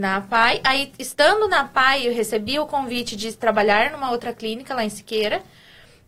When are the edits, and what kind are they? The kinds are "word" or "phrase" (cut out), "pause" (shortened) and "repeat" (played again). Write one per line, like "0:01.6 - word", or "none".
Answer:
none